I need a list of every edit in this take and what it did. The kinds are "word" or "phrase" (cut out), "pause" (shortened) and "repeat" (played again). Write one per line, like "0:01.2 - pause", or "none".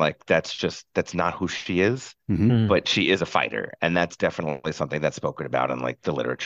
0:02.2 - pause